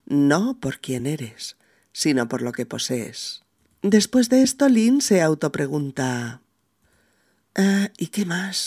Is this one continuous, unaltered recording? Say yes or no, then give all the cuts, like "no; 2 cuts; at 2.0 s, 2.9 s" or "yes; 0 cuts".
yes; 0 cuts